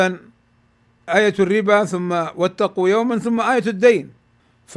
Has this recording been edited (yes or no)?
no